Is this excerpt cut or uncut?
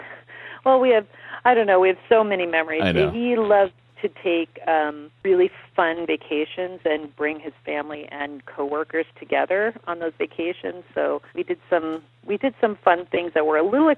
cut